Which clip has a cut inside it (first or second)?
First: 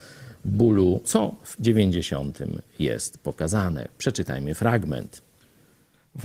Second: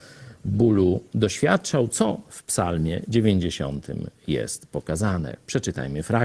first